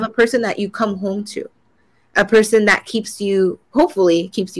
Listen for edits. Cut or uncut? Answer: uncut